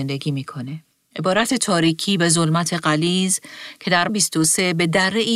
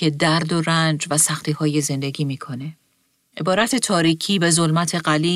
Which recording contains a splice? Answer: first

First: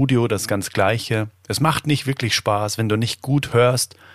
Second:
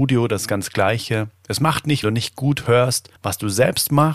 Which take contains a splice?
second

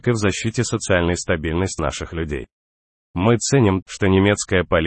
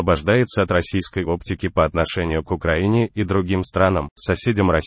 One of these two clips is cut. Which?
first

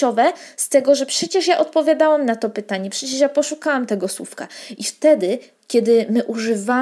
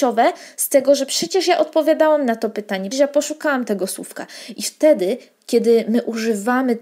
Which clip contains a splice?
second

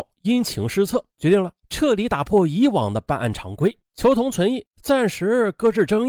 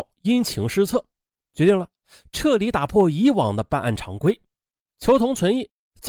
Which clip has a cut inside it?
first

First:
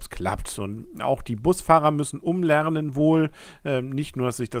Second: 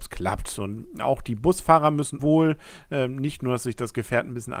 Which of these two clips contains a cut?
second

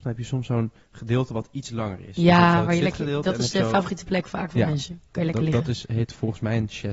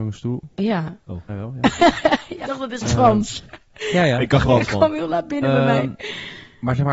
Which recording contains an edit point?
second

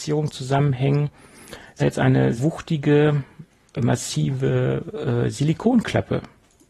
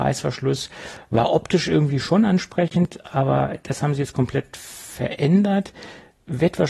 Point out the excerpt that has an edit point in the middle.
first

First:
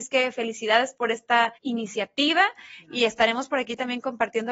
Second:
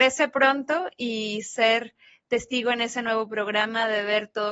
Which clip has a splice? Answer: first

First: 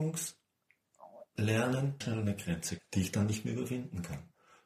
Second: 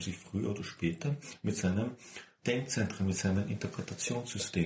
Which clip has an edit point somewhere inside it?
first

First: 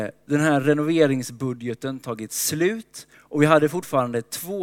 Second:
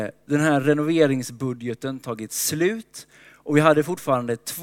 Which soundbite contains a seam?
first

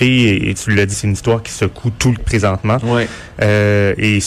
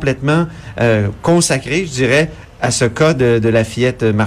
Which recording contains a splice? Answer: first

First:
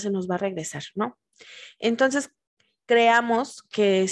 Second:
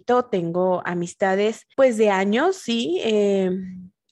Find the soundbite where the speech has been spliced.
second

